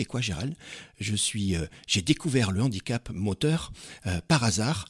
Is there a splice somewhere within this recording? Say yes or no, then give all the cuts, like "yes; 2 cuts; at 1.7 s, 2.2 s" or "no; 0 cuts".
no; 0 cuts